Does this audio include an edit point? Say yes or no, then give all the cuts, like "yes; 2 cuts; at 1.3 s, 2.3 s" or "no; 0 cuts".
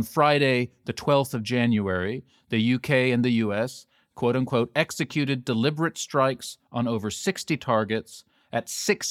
no; 0 cuts